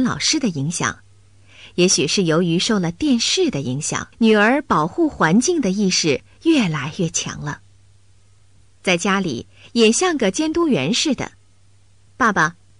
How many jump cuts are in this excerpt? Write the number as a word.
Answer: one